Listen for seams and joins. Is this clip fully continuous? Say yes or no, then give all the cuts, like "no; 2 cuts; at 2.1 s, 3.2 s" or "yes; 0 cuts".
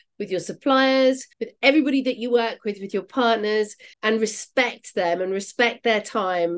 no; 2 cuts; at 1.3 s, 3.9 s